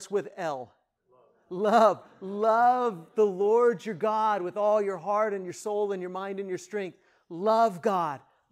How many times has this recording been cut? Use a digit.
0